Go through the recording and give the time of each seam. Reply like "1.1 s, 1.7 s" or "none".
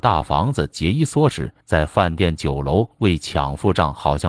1.6 s